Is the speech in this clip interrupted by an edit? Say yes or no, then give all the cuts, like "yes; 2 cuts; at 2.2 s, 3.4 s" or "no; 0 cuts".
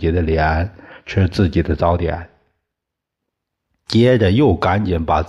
no; 0 cuts